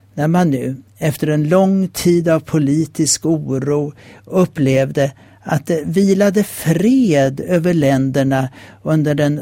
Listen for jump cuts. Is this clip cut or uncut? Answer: uncut